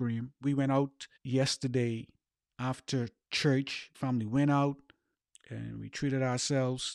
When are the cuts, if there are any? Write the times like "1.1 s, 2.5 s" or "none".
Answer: 1.2 s, 3.9 s, 5.1 s